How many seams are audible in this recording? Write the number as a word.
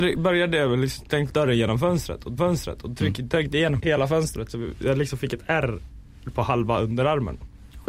three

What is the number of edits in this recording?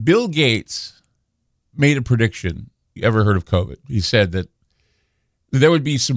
two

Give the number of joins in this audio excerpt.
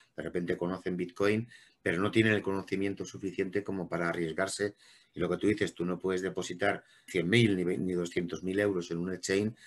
one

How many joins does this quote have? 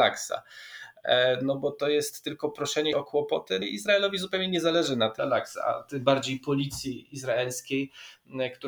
three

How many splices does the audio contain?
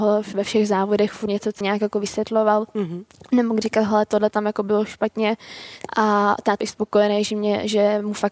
four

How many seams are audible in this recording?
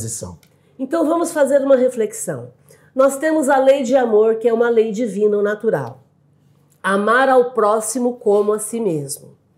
zero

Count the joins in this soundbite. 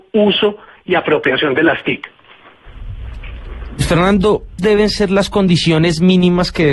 one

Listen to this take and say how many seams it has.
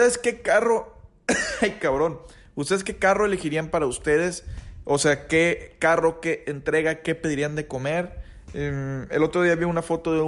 zero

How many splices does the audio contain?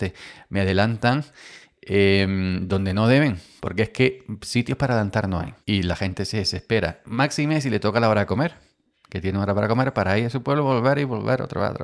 one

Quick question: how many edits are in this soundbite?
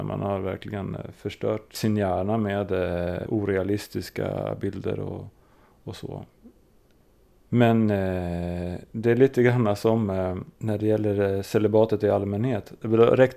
zero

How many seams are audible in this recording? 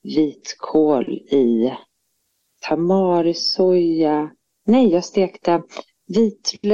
zero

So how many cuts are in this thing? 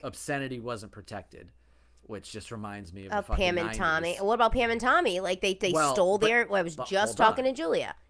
zero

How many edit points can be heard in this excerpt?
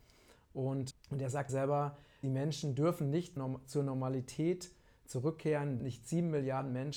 five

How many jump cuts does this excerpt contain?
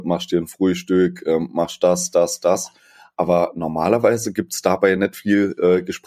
zero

